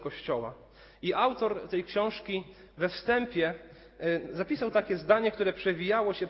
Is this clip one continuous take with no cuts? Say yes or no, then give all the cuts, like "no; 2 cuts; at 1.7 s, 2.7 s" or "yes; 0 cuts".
yes; 0 cuts